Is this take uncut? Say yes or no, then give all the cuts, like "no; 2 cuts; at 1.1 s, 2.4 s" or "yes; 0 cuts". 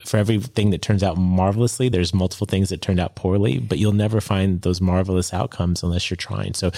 yes; 0 cuts